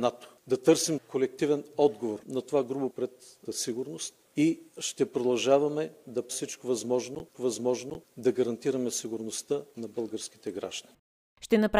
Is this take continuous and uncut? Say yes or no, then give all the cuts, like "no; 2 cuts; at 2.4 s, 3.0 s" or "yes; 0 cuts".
no; 8 cuts; at 1.0 s, 2.2 s, 2.9 s, 3.4 s, 4.7 s, 6.3 s, 7.3 s, 9.7 s